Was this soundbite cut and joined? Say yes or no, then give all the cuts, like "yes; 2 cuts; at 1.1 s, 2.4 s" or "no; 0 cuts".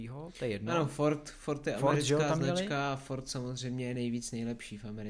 no; 0 cuts